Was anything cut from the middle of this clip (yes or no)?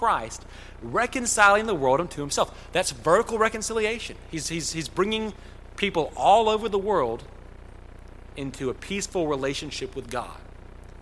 no